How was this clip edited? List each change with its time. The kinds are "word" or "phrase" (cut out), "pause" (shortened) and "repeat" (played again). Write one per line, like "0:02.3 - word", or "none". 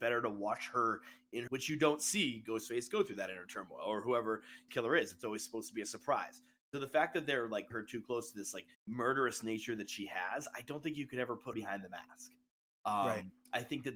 0:01.5 - phrase
0:04.7 - phrase
0:07.7 - word
0:08.7 - pause
0:11.5 - word